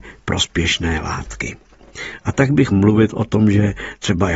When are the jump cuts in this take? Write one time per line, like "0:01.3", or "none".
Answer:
0:02.7